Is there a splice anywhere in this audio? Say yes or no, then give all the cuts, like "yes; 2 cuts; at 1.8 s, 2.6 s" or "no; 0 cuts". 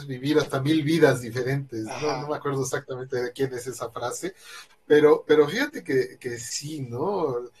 no; 0 cuts